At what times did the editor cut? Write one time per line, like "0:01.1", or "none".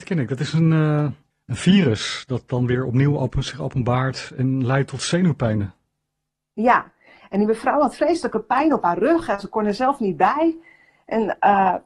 none